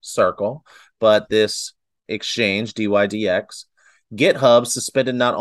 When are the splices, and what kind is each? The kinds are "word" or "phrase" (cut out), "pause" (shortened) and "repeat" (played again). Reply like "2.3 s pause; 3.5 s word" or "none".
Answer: none